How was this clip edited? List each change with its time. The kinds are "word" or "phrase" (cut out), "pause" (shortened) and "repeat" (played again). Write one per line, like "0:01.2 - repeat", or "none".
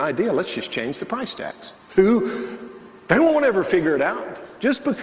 0:01.8 - pause